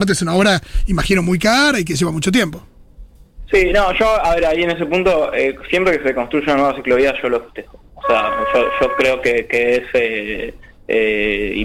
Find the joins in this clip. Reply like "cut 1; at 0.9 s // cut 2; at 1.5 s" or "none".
none